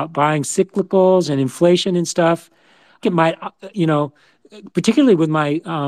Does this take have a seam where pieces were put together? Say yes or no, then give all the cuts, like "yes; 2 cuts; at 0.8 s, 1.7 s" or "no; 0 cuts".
yes; 1 cut; at 3.0 s